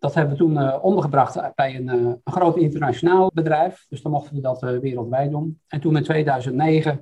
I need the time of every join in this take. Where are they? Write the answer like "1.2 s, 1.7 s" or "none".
3.3 s